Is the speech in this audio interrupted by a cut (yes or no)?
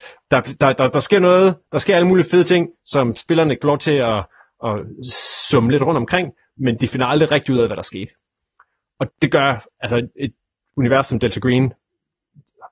yes